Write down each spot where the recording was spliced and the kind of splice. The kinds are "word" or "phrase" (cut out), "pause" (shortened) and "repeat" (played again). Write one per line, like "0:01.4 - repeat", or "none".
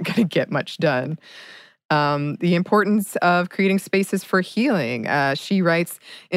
none